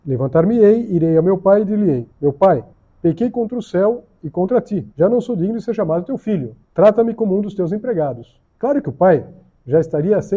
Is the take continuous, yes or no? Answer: no